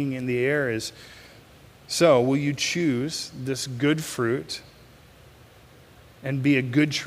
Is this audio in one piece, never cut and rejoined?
yes; 0 cuts

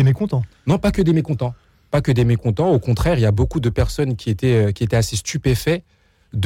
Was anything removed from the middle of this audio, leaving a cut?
no; 0 cuts

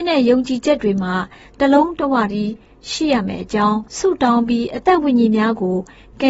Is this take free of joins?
no; 1 cut; at 3.9 s

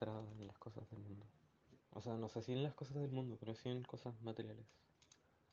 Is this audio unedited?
no; 1 cut; at 1.8 s

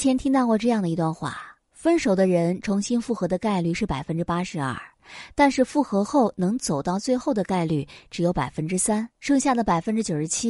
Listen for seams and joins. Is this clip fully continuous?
no; 2 cuts; at 1.6 s, 9.1 s

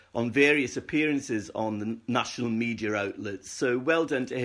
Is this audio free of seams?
yes; 0 cuts

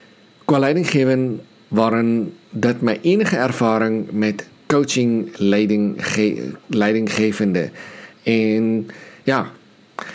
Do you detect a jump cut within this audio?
no; 0 cuts

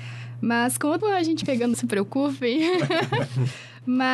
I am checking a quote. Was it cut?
yes; 3 cuts; at 1.0 s, 1.4 s, 1.7 s

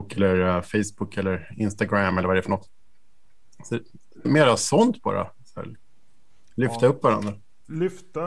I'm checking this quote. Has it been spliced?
yes; 1 cut; at 4.2 s

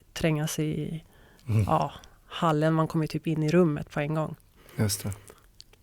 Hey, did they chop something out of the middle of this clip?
no; 0 cuts

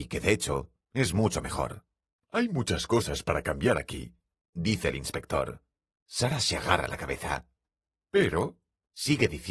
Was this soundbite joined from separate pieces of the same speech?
no; 0 cuts

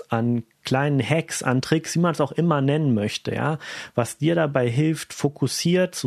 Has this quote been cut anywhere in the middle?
no; 0 cuts

